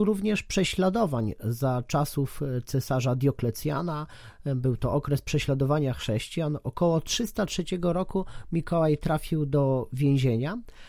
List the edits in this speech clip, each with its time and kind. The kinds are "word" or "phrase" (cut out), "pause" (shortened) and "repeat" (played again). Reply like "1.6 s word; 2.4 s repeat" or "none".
none